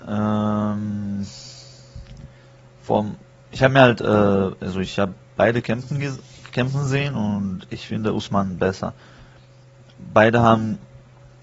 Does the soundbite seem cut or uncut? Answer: uncut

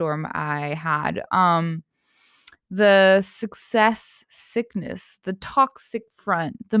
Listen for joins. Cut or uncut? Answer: uncut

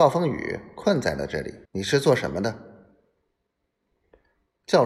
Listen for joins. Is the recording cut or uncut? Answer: cut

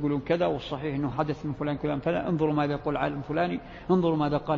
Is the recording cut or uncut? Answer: cut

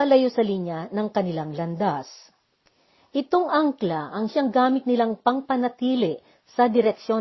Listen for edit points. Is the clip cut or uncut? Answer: uncut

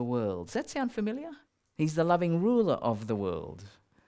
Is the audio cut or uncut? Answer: cut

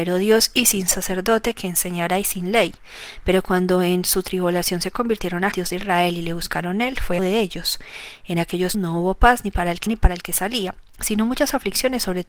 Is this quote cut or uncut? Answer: cut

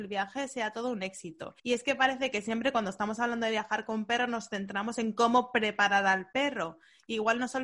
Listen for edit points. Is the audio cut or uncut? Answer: cut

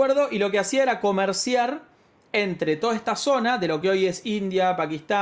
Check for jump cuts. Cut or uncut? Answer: uncut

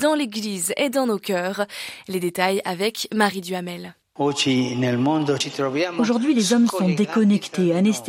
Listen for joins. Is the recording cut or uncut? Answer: uncut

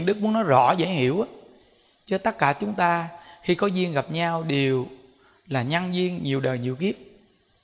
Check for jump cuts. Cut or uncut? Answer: uncut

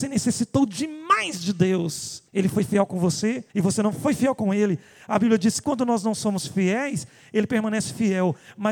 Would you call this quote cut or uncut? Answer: cut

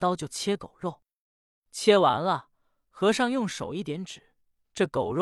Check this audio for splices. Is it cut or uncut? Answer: uncut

